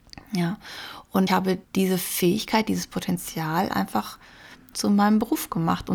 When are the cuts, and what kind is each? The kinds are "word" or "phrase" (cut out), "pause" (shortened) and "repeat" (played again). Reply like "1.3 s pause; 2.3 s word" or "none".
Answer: 1.3 s word; 1.6 s pause; 4.7 s phrase